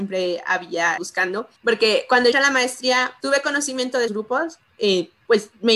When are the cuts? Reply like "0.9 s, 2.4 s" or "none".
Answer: 1.0 s, 1.6 s, 2.3 s, 3.2 s, 4.1 s